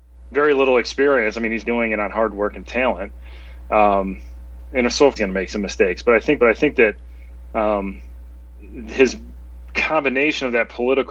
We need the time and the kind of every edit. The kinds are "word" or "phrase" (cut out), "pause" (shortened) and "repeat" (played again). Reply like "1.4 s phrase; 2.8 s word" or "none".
1.6 s word; 5.2 s phrase; 6.4 s repeat